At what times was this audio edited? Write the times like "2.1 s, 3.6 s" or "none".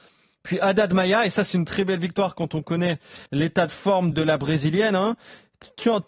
3.3 s, 4.1 s

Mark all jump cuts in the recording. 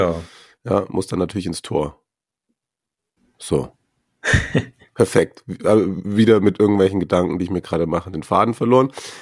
none

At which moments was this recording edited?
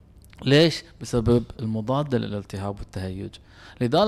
1.5 s

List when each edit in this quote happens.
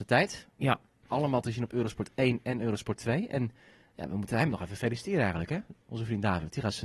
none

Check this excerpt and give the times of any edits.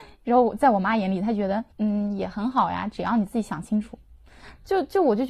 1.7 s

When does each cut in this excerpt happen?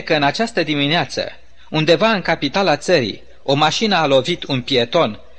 none

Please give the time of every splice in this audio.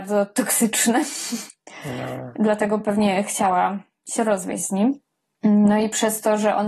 none

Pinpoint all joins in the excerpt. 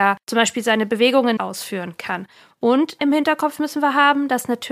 1.4 s, 3.0 s

